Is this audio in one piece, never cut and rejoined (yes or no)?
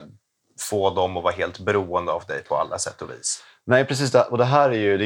yes